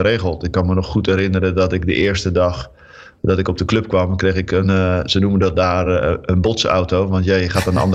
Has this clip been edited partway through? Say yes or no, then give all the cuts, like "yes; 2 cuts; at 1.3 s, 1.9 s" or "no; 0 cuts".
no; 0 cuts